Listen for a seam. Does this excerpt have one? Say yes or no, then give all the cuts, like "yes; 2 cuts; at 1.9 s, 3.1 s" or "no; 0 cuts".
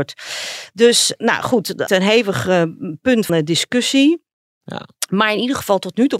yes; 2 cuts; at 1.9 s, 3.3 s